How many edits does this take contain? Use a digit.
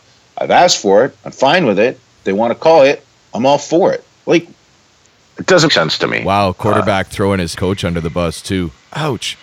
4